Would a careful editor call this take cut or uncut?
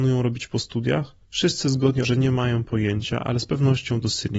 cut